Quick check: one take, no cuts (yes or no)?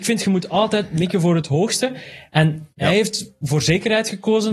no